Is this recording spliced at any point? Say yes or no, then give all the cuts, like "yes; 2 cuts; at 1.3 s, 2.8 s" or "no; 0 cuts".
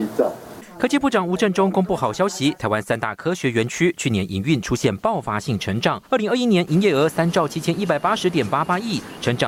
yes; 1 cut; at 6.1 s